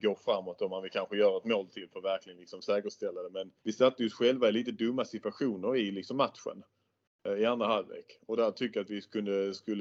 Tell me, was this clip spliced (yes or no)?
yes